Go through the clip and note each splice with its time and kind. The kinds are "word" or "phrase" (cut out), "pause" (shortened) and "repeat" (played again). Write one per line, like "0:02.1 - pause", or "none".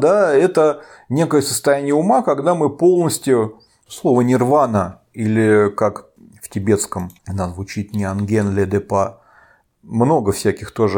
0:07.2 - pause

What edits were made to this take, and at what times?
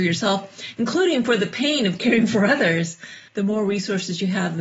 0:03.3 - pause

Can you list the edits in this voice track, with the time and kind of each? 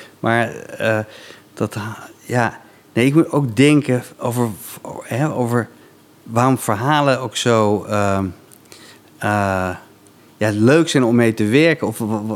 0:04.1 - pause

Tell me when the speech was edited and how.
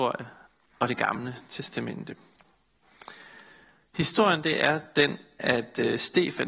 none

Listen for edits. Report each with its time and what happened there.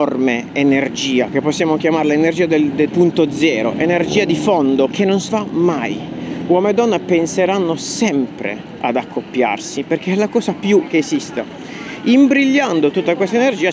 0:02.9 - word
0:04.9 - word
0:05.3 - word
0:10.9 - word

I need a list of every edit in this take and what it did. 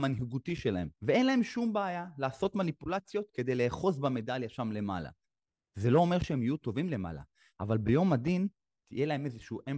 0:00.9 - pause

